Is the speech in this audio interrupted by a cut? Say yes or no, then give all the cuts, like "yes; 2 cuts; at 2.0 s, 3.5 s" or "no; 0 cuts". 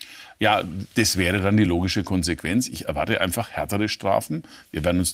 no; 0 cuts